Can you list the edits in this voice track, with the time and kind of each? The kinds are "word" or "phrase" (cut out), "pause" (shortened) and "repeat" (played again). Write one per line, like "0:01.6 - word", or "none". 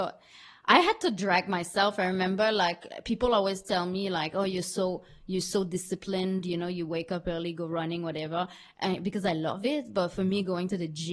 none